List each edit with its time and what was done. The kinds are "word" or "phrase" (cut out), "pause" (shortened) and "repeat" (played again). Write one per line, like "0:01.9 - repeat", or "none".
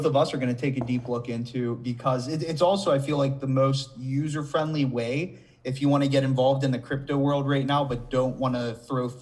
none